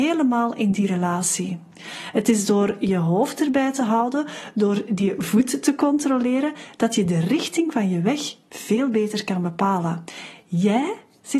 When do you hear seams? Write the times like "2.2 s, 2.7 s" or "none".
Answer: none